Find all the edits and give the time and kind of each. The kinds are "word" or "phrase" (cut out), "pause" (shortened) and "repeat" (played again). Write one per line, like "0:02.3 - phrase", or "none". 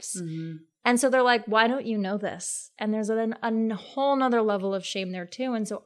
none